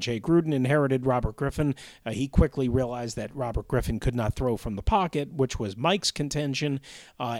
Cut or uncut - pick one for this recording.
uncut